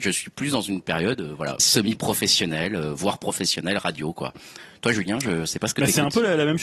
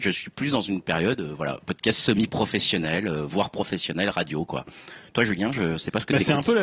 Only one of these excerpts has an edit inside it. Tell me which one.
first; 1 cut; at 1.6 s

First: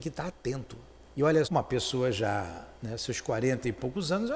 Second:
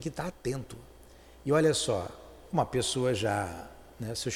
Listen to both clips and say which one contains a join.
first; 3 cuts; at 1.1 s, 1.4 s, 2.7 s

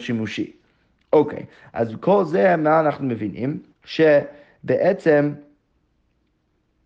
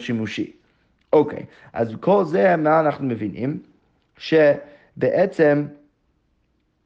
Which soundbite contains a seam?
first; 1 cut; at 3.7 s

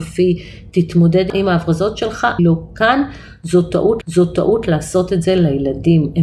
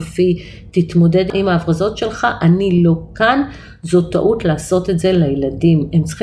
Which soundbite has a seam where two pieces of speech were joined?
first; 2 cuts; at 2.4 s, 4.0 s

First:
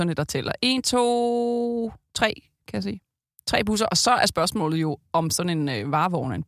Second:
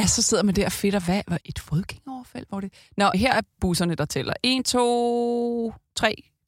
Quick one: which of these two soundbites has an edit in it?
second; 3 cuts; at 1.4 s, 3.1 s, 3.6 s

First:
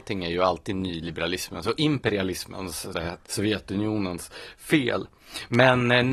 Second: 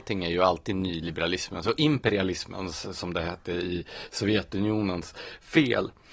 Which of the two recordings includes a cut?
first; 2 cuts; at 2.9 s, 3.3 s

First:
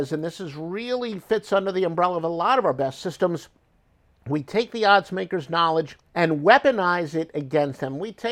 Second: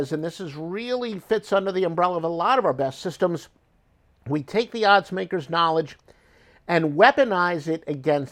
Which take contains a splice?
first; 1 cut; at 6.1 s

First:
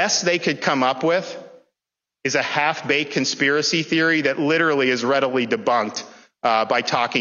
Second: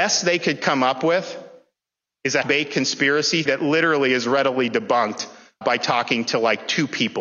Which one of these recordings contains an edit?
second; 3 cuts; at 2.4 s, 3.5 s, 5.6 s

